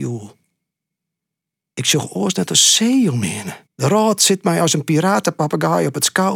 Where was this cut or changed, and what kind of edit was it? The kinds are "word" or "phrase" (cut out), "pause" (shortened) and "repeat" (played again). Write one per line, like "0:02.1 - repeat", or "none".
0:03.6 - pause